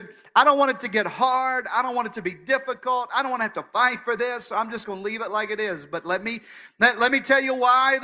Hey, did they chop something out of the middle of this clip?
no; 0 cuts

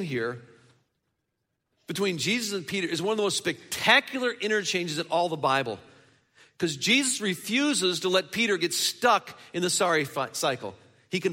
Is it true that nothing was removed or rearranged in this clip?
yes; 0 cuts

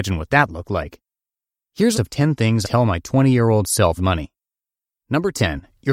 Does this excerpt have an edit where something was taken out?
yes; 3 cuts; at 1.9 s, 2.6 s, 4.0 s

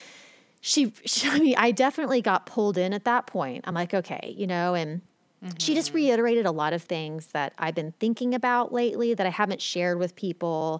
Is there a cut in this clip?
no; 0 cuts

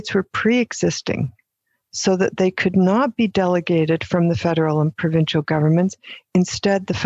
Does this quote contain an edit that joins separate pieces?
no; 0 cuts

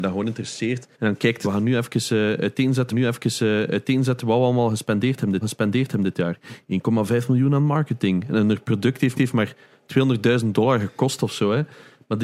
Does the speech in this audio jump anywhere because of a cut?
yes; 5 cuts; at 0.9 s, 1.4 s, 2.9 s, 5.4 s, 9.1 s

